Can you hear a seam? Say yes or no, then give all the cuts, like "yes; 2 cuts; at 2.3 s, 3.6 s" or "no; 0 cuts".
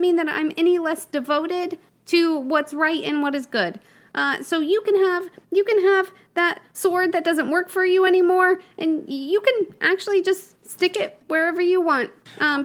no; 0 cuts